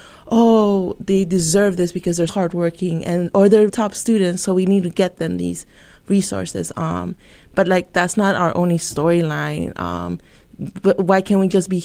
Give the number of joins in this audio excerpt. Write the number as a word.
two